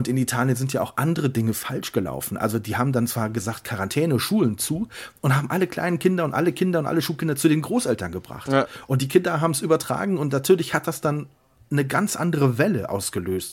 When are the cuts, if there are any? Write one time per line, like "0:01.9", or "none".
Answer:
none